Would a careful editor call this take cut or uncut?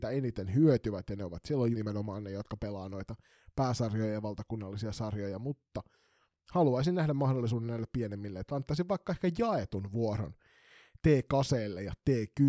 cut